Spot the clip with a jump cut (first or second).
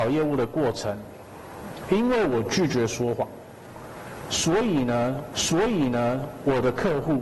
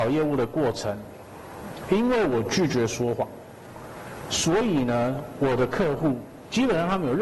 first